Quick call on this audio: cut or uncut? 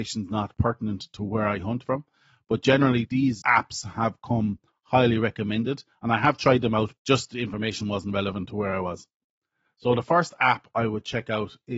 uncut